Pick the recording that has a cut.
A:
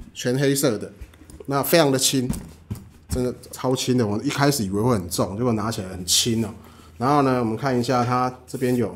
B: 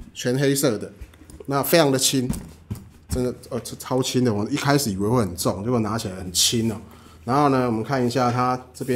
A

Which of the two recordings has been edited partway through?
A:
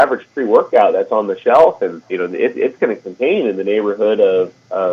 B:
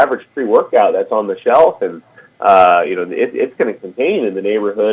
A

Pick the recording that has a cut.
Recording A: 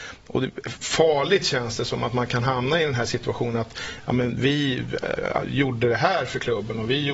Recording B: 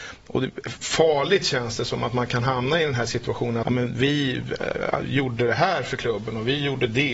B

